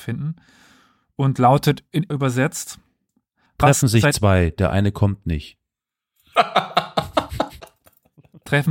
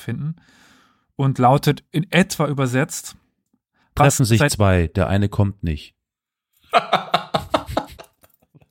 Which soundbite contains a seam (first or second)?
first